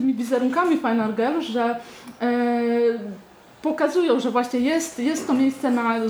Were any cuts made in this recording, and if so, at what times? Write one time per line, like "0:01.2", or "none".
none